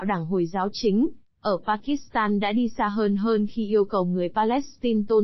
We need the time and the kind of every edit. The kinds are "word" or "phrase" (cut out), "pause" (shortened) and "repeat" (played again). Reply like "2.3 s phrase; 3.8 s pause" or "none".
none